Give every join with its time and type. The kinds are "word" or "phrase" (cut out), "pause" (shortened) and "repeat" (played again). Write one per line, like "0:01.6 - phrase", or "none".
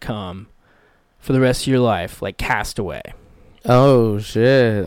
none